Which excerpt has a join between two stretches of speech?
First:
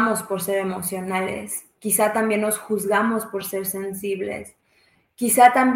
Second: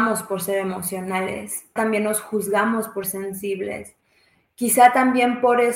second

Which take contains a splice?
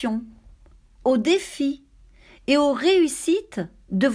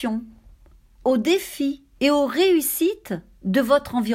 second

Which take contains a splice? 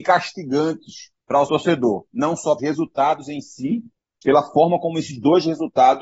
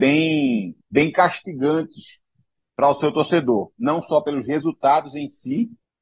first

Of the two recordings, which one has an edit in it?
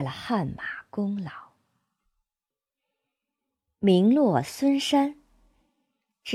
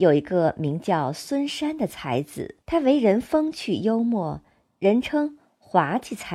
second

